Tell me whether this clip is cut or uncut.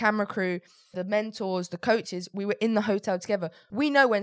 cut